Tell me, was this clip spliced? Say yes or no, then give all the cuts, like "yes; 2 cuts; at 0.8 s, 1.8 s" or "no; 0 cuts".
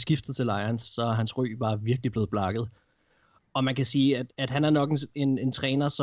no; 0 cuts